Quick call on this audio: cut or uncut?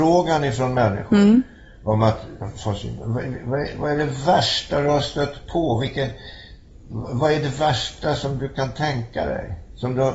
uncut